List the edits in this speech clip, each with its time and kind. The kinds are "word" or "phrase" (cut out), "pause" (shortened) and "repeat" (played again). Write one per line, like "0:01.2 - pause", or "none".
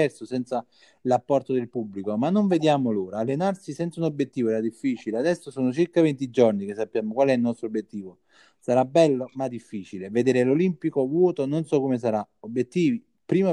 none